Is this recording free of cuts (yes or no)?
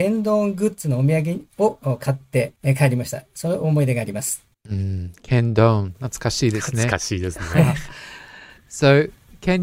no